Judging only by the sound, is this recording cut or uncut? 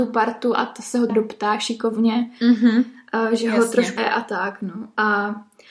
cut